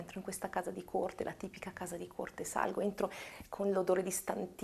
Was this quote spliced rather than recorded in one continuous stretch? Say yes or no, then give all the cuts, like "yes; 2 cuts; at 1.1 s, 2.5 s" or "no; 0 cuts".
no; 0 cuts